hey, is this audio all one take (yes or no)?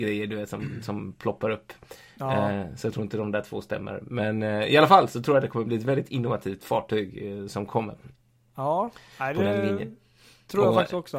yes